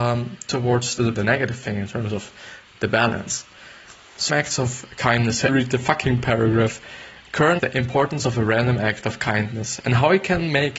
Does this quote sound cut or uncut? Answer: cut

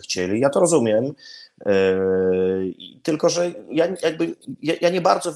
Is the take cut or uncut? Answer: uncut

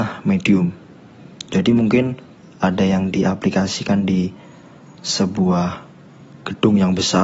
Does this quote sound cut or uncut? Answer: uncut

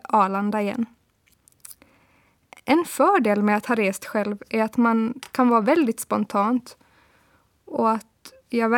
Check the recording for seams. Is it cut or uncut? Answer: uncut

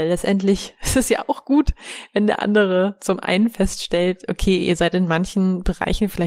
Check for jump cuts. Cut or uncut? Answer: uncut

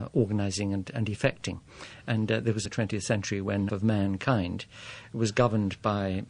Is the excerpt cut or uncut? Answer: cut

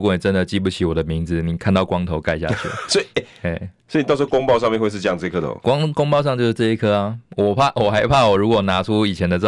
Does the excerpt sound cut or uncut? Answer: uncut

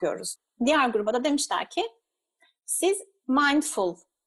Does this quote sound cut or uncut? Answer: uncut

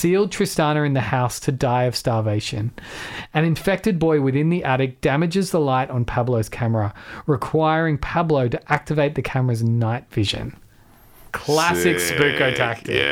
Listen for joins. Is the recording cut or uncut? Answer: uncut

